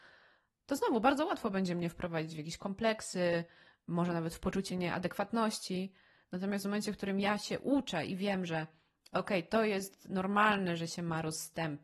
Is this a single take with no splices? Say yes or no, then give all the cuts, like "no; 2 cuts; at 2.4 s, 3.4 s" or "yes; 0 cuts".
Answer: no; 1 cut; at 4.7 s